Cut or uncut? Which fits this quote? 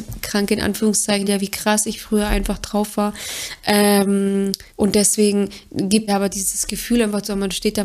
cut